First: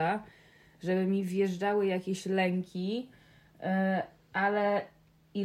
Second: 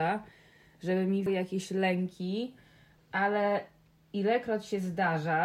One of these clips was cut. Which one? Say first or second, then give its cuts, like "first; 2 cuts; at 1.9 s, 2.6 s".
second; 2 cuts; at 1.3 s, 3.0 s